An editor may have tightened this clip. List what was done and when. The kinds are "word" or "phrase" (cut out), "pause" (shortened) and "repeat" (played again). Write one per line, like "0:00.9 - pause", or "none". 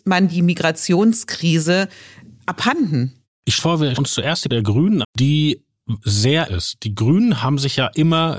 0:03.6 - word
0:04.0 - word
0:04.5 - word
0:05.0 - word
0:06.5 - word